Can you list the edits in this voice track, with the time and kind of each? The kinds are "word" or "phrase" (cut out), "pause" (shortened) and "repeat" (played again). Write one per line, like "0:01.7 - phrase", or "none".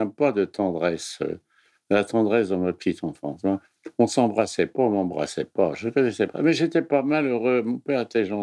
none